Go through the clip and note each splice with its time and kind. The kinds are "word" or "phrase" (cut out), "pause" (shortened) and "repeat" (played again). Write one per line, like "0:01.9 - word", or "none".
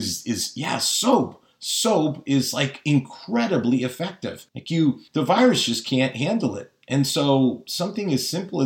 0:04.5 - pause
0:05.1 - pause

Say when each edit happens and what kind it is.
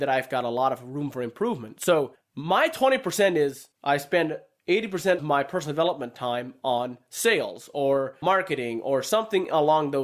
0:03.7 - pause
0:05.2 - word

